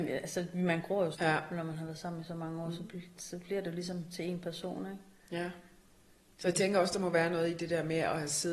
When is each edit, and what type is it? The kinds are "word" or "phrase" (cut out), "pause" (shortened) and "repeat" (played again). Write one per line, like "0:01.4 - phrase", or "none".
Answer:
0:01.1 - word